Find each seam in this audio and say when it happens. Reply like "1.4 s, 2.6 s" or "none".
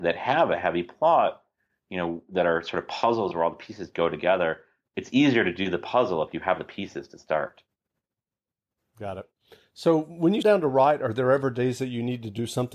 10.4 s